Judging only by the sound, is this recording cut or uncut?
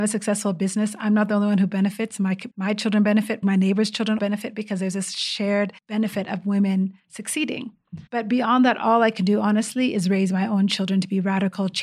cut